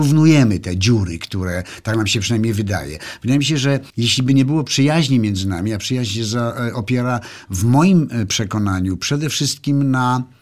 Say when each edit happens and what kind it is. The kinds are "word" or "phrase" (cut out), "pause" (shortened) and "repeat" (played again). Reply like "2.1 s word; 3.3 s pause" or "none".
3.9 s pause